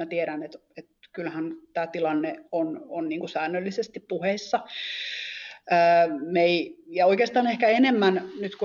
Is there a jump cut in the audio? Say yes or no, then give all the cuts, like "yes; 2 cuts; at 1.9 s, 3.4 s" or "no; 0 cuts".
no; 0 cuts